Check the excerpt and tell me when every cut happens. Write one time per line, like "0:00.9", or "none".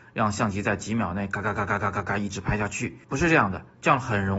0:03.0

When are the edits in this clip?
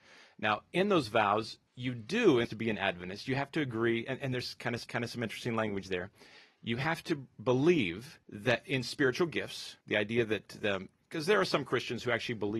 0:01.7
0:02.4
0:04.8
0:08.2
0:09.8

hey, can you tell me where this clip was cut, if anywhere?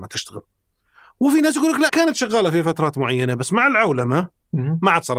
0:01.9

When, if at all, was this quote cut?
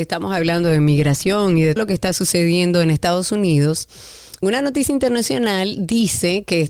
0:01.8
0:04.4

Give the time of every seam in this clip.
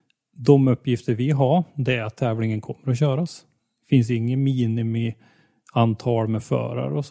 none

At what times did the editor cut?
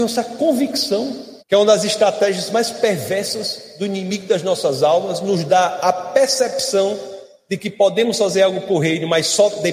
0:01.4

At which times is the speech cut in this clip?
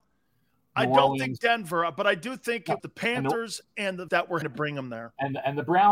0:02.8
0:04.1
0:04.4

